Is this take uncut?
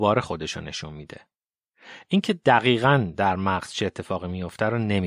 yes; 0 cuts

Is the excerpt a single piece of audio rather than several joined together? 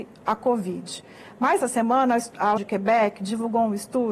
no; 2 cuts; at 1.6 s, 2.6 s

